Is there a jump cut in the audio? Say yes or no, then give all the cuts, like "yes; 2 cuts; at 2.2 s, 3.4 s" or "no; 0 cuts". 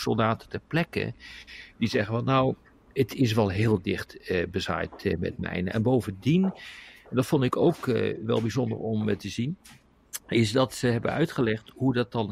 no; 0 cuts